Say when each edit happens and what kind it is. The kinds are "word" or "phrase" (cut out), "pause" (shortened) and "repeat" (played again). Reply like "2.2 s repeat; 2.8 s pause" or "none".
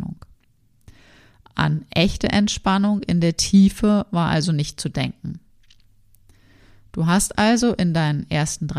none